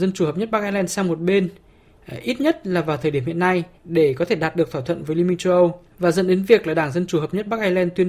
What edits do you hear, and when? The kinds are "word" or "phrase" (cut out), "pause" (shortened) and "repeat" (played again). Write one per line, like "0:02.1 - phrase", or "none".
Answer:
0:03.7 - pause
0:05.9 - pause